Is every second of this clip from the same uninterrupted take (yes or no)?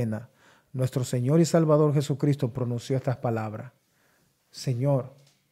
yes